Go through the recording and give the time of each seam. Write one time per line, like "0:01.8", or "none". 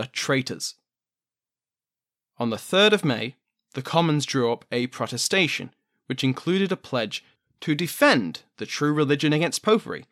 none